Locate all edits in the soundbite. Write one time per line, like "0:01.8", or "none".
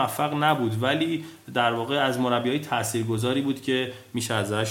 none